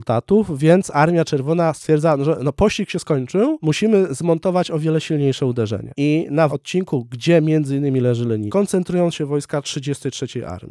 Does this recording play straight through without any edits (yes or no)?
no